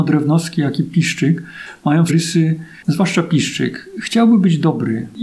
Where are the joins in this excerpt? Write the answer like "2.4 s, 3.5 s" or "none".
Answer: 2.1 s, 2.8 s